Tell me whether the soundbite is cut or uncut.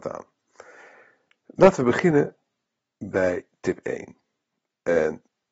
uncut